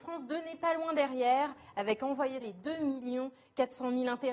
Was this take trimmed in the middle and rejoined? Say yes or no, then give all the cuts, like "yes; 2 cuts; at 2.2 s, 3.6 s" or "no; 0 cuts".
yes; 1 cut; at 2.4 s